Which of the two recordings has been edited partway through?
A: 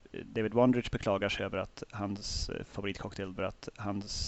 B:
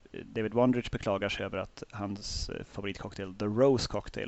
A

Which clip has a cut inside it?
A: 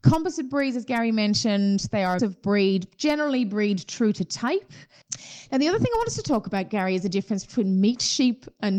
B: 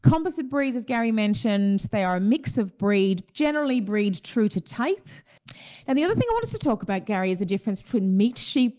A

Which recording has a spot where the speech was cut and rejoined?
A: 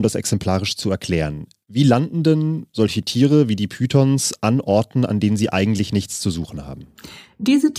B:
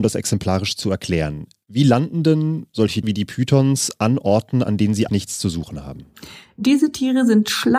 B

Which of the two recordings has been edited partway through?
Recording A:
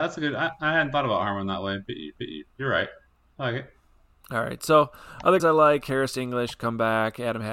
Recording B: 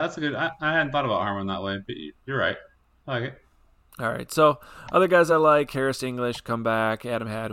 A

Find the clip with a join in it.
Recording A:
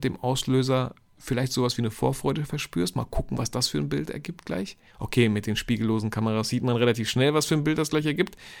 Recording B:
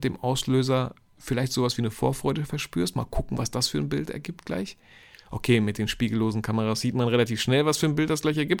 A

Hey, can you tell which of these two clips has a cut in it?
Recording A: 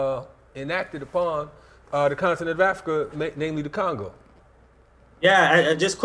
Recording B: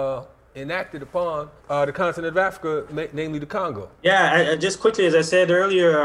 B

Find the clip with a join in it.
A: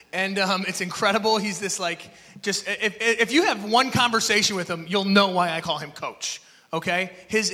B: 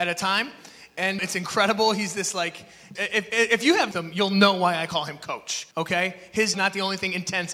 B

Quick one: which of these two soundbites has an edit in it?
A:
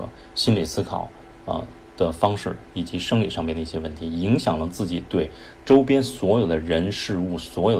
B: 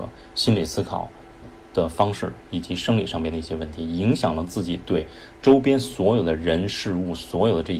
B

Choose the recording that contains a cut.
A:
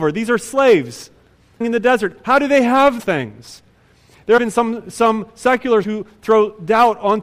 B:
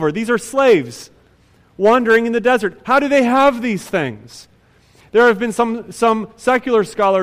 A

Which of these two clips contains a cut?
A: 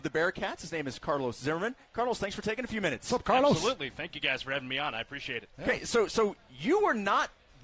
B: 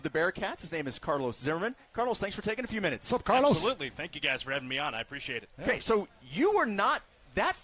B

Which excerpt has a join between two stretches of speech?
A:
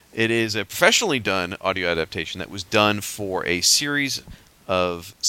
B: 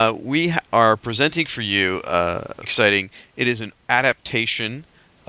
B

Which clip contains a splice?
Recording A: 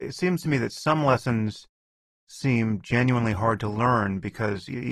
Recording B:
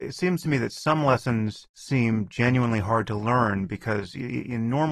B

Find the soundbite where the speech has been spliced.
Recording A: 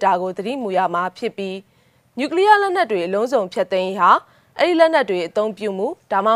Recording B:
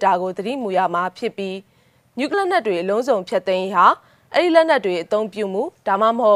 B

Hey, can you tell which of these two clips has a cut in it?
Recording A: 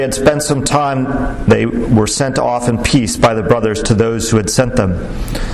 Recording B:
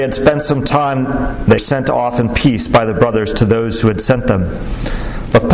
B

